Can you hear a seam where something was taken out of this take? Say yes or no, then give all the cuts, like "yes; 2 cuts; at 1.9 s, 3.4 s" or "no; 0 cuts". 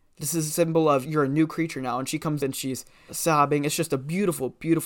yes; 3 cuts; at 1.0 s, 2.4 s, 3.1 s